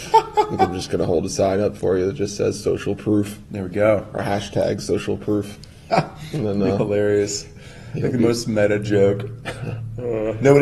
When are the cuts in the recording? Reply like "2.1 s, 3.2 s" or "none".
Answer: none